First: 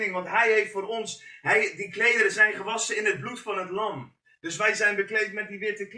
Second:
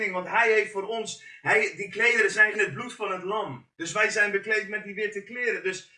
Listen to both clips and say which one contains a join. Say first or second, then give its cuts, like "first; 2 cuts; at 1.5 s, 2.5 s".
second; 2 cuts; at 2.5 s, 3.7 s